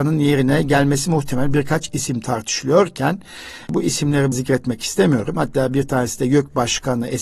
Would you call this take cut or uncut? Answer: cut